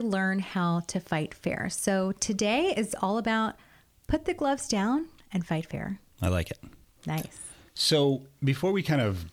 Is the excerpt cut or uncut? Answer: uncut